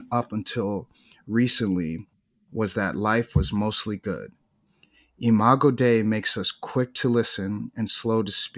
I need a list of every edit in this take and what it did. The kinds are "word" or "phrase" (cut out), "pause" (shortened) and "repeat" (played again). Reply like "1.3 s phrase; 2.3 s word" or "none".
none